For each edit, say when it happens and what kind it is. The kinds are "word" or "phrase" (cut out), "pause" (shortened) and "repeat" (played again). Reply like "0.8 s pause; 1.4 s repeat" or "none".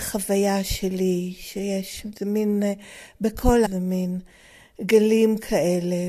3.6 s word